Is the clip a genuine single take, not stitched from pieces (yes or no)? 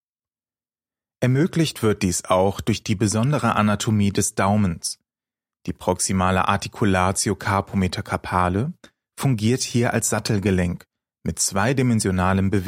yes